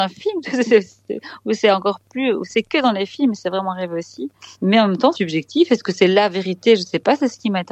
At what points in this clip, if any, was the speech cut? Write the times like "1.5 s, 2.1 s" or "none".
4.5 s, 5.1 s